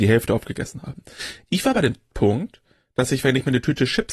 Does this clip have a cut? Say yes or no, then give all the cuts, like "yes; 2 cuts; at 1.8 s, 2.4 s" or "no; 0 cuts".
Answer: no; 0 cuts